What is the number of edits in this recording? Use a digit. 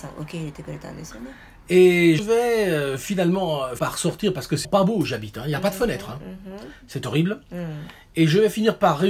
3